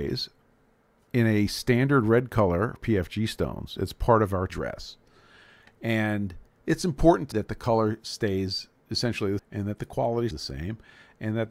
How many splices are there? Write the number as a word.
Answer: five